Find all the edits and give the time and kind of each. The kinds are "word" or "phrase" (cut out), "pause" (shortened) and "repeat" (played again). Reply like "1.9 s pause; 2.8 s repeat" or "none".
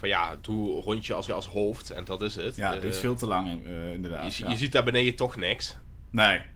1.3 s repeat